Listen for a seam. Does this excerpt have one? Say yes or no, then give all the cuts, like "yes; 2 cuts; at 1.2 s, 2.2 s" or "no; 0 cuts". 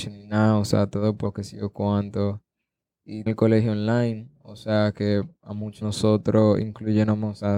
yes; 3 cuts; at 1.2 s, 3.3 s, 5.8 s